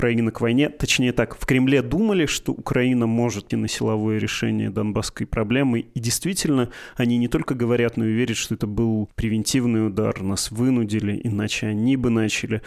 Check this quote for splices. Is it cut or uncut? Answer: cut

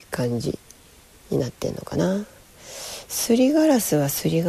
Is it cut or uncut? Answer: uncut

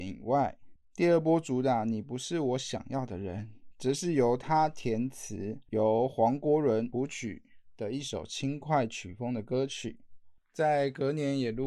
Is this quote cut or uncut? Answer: uncut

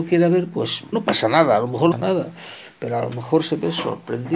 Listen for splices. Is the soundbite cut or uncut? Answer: cut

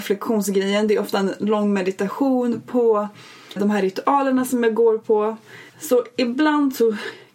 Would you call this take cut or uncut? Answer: cut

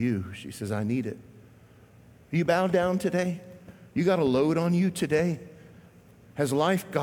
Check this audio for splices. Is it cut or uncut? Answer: uncut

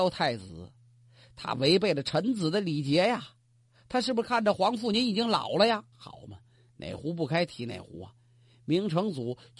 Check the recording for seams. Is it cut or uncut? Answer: cut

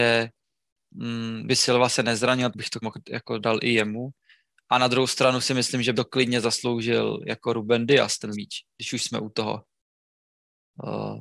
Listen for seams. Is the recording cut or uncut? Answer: cut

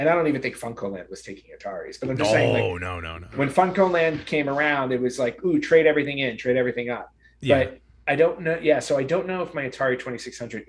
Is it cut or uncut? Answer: uncut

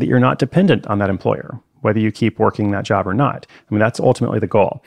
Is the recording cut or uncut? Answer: uncut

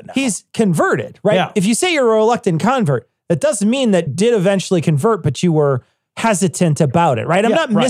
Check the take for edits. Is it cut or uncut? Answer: cut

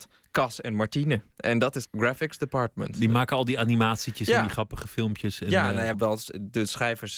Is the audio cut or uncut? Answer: cut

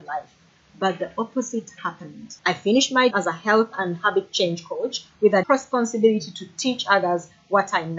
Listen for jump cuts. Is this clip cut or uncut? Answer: cut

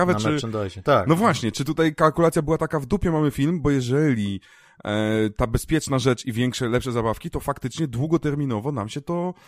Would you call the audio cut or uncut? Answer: uncut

